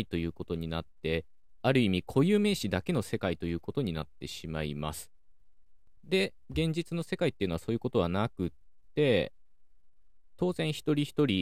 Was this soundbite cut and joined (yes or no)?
yes